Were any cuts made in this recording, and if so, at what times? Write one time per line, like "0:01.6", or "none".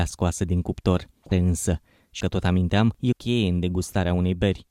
0:01.3
0:02.2
0:03.1